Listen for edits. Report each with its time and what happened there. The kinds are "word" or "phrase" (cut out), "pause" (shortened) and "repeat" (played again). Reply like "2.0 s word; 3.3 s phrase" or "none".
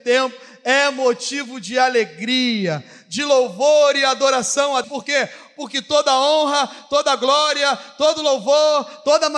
4.8 s word